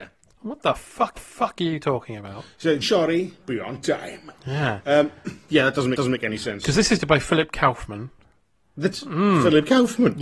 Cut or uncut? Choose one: cut